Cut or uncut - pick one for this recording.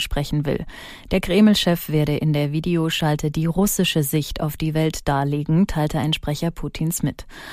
uncut